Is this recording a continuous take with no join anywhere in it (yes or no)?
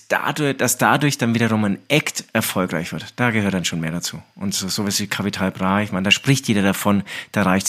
yes